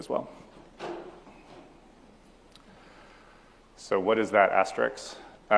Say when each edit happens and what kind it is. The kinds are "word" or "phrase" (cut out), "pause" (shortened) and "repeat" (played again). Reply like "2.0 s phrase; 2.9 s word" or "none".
none